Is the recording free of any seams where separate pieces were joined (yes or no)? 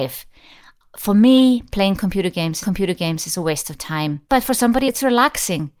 no